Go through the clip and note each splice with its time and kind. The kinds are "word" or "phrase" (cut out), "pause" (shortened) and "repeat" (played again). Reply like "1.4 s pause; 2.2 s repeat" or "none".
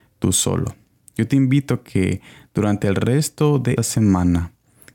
3.8 s word